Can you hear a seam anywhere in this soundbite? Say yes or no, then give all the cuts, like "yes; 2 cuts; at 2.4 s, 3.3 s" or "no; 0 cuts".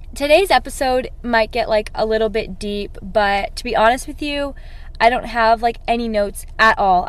no; 0 cuts